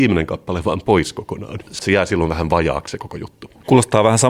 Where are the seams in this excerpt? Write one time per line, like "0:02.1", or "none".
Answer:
0:01.8